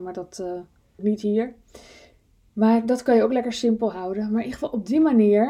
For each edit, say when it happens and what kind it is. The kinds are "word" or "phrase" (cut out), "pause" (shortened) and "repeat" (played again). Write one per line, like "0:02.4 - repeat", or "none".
0:01.0 - word